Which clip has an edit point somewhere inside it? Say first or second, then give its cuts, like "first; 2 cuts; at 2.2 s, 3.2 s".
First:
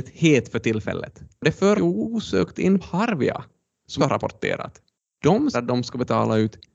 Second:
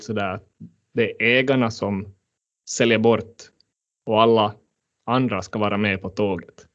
first; 4 cuts; at 1.7 s, 2.8 s, 4.0 s, 5.5 s